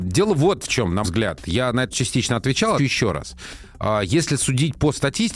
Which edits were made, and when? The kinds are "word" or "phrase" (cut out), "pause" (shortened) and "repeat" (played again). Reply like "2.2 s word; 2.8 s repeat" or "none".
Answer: 1.0 s word; 1.9 s word; 2.8 s word